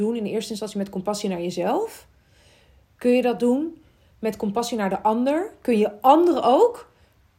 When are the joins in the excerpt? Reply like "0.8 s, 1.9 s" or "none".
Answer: none